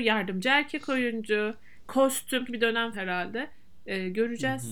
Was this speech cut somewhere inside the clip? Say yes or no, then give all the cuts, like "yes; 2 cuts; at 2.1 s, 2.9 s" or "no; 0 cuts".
yes; 3 cuts; at 1.9 s, 2.5 s, 2.9 s